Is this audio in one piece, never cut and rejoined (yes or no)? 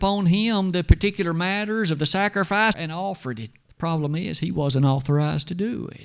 no